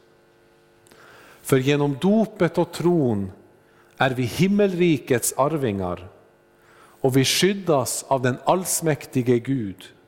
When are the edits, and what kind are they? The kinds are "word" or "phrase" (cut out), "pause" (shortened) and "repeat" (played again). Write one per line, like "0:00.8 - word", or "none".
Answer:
none